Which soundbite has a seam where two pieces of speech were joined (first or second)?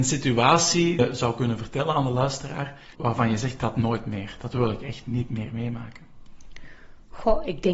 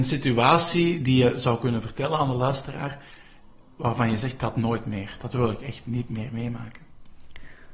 first